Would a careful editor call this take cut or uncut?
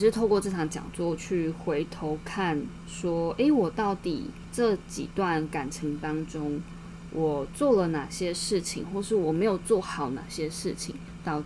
uncut